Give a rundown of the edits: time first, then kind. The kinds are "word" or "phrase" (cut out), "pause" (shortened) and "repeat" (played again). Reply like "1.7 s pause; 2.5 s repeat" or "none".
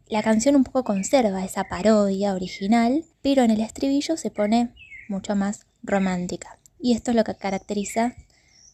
3.1 s pause; 6.7 s pause